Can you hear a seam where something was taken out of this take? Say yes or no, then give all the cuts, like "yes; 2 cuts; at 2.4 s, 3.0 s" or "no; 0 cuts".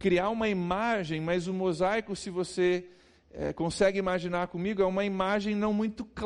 no; 0 cuts